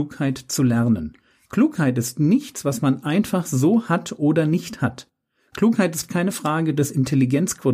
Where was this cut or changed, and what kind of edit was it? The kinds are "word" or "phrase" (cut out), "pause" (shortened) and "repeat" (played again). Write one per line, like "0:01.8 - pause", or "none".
none